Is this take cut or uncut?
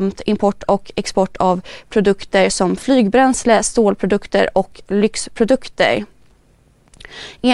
uncut